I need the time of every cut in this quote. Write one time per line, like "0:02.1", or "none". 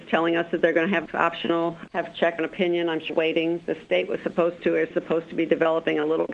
0:01.1
0:01.9
0:02.4
0:03.1